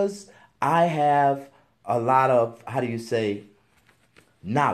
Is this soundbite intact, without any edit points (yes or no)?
yes